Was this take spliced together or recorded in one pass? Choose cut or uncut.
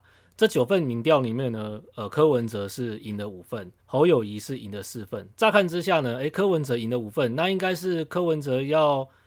cut